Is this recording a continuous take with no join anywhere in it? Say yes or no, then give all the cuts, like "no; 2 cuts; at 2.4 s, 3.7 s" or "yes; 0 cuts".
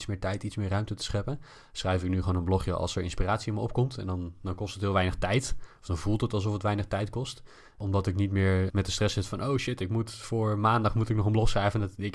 yes; 0 cuts